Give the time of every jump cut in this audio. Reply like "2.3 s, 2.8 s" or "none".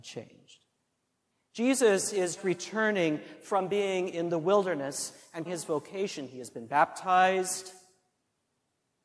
1.3 s, 2.4 s, 5.5 s